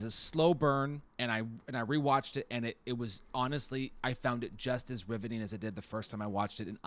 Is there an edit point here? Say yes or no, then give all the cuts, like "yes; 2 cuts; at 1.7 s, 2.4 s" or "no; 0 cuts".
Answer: yes; 1 cut; at 1.1 s